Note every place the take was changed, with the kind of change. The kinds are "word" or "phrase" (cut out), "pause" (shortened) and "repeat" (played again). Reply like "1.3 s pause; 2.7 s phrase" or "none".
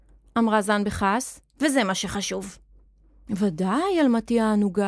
none